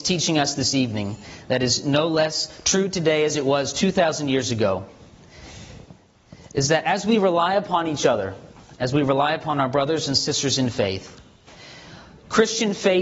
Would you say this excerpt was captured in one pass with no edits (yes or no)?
yes